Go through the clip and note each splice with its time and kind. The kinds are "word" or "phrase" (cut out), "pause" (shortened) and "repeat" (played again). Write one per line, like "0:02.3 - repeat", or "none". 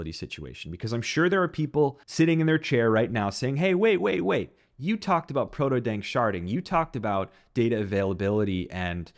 0:02.0 - pause